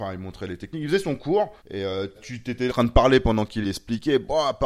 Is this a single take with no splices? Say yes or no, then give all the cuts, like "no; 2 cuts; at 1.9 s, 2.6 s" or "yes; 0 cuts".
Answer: no; 4 cuts; at 1.6 s, 2.2 s, 2.7 s, 3.6 s